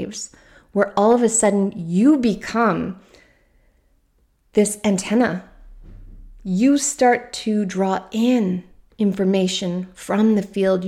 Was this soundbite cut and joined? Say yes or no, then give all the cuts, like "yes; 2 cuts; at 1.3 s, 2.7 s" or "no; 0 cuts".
no; 0 cuts